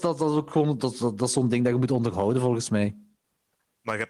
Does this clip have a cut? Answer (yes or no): no